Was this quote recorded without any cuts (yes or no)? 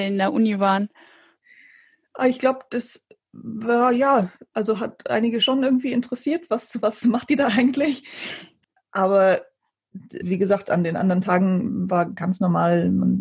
no